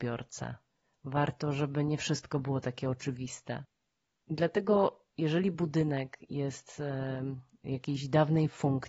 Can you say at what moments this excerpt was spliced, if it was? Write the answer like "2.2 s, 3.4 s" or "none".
none